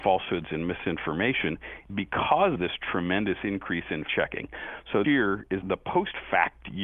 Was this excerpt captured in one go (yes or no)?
no